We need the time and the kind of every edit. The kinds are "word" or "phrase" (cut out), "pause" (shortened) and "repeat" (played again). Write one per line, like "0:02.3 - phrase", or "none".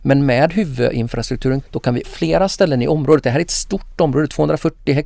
0:01.6 - word
0:02.0 - word